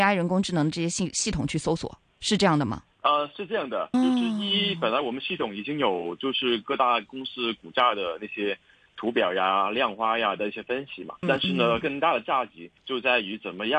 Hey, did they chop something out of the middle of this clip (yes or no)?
yes